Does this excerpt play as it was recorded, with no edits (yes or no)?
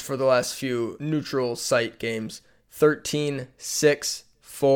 yes